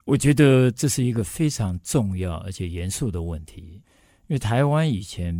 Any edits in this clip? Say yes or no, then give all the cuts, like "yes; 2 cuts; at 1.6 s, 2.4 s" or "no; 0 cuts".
no; 0 cuts